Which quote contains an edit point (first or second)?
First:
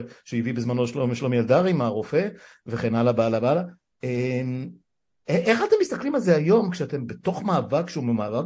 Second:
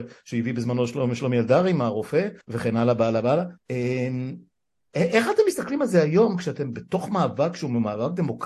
second